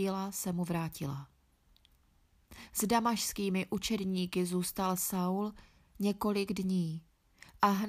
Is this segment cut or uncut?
uncut